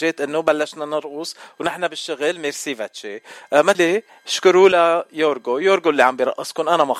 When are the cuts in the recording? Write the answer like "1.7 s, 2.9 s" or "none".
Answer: 3.7 s